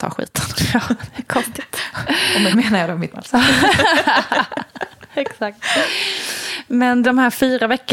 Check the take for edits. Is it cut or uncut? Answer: cut